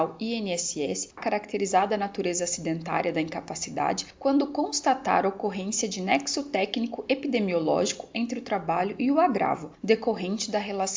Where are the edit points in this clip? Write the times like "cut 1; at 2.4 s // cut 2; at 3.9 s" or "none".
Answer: cut 1; at 1.2 s